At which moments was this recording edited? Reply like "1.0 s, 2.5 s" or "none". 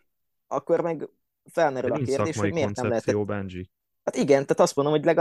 none